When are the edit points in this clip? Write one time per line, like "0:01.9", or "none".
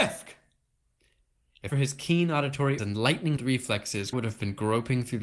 0:01.7
0:02.8
0:03.4
0:04.1